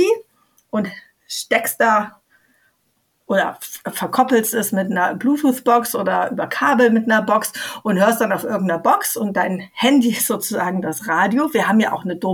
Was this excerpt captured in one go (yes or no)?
yes